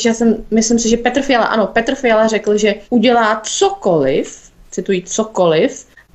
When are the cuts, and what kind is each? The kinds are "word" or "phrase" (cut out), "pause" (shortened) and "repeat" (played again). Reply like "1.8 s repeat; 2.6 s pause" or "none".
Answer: 2.8 s pause